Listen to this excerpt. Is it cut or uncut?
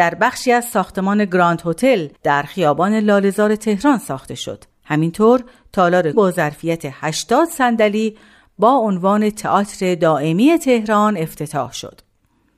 cut